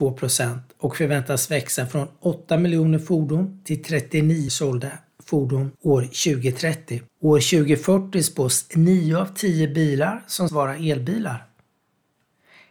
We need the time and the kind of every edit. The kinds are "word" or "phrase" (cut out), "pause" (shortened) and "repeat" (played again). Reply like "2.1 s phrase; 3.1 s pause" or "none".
4.5 s word; 5.7 s pause; 7.1 s pause; 10.5 s word